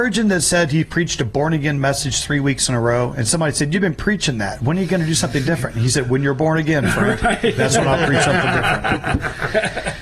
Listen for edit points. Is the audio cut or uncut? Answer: uncut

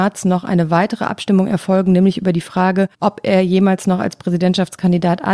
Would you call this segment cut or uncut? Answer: cut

